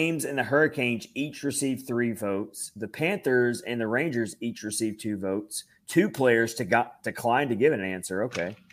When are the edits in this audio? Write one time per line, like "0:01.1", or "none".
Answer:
none